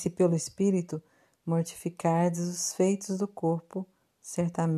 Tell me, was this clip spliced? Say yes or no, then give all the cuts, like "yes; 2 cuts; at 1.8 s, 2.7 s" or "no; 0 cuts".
no; 0 cuts